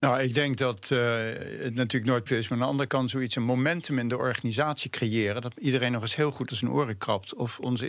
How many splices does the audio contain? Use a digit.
3